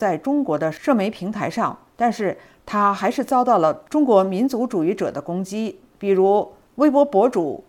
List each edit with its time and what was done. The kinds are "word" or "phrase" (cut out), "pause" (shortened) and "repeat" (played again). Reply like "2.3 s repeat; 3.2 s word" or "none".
none

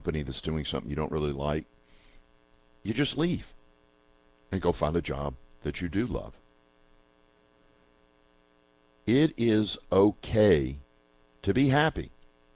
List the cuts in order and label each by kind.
none

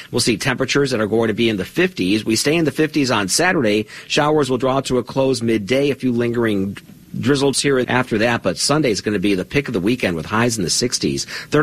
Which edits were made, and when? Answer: 7.5 s word; 7.8 s word

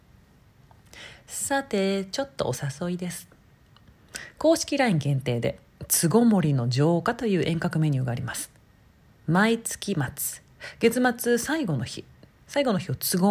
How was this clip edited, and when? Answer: none

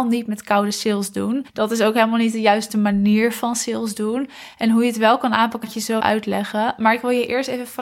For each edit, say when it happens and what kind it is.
1.5 s pause; 5.6 s word; 6.0 s word

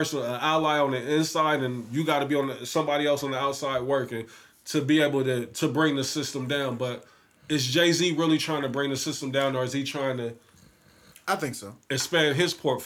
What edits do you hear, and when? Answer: none

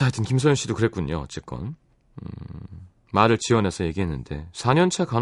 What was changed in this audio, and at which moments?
none

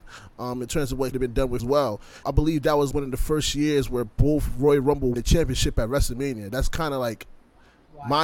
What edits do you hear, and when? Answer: 1.1 s word; 1.6 s phrase; 2.2 s word; 2.9 s word; 5.1 s phrase

